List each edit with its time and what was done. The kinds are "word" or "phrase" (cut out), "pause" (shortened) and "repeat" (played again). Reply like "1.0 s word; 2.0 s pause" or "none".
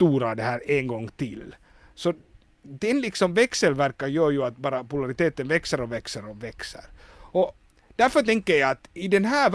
none